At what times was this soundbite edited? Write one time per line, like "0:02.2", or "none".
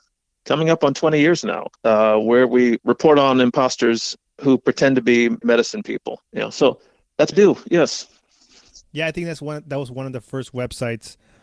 0:01.8
0:02.8
0:05.4
0:06.3
0:07.3